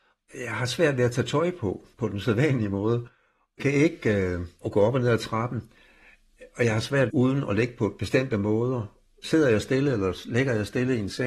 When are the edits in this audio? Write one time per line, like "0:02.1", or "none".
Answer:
0:01.9
0:03.6
0:04.6
0:07.1